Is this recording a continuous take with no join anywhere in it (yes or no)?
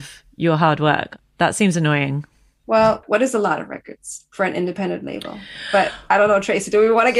yes